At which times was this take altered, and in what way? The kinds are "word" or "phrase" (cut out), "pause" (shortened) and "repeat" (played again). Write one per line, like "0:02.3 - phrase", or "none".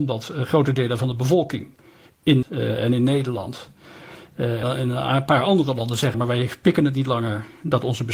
0:02.4 - word
0:04.6 - word
0:06.1 - word

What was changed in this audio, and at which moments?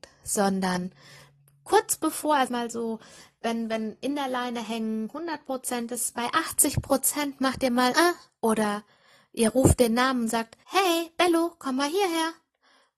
0:02.5 - phrase
0:07.9 - word
0:10.6 - pause

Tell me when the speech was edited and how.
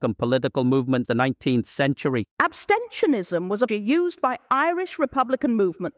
0:01.1 - word
0:02.3 - pause
0:03.7 - phrase

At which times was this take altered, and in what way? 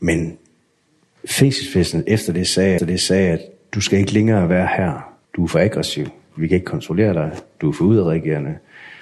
0:02.8 - repeat
0:05.2 - pause

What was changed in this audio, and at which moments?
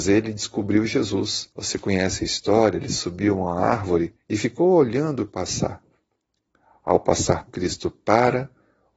0:01.5 - pause
0:04.2 - pause
0:05.3 - word
0:07.5 - word

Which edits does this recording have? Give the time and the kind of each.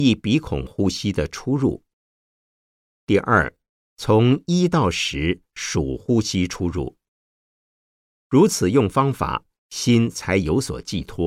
none

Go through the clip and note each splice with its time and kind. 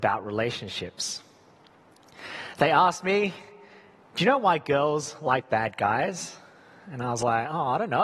none

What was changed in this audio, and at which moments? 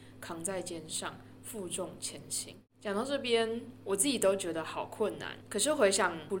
0:02.7 - pause

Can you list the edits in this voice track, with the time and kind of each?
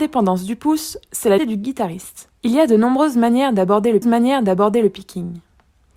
0:01.4 - word
0:02.4 - pause
0:04.0 - repeat

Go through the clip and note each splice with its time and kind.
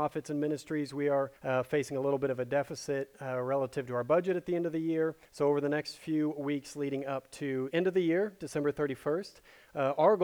0:01.4 - pause
0:05.3 - pause
0:07.7 - word

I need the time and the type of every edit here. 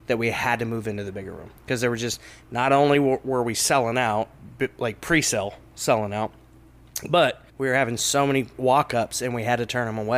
0:01.6 - pause
0:07.5 - pause

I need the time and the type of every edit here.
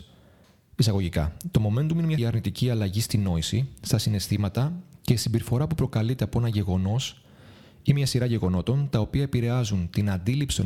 0:02.2 - word

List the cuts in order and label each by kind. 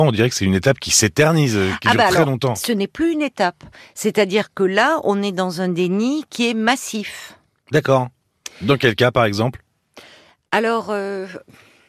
none

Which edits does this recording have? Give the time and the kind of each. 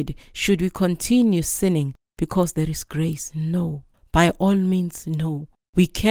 none

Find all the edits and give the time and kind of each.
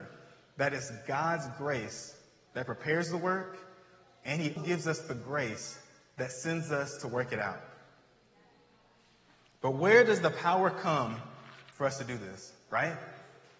0:04.6 - word

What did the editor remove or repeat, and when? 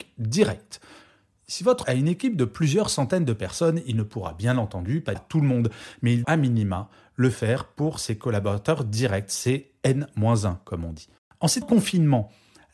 0:01.8 - word
0:05.1 - phrase
0:06.2 - word
0:11.2 - pause
0:11.6 - word

